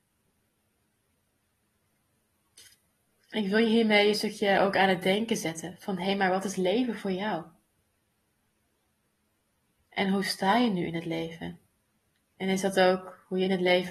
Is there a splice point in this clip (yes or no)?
no